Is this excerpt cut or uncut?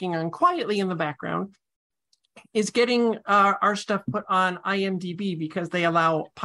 uncut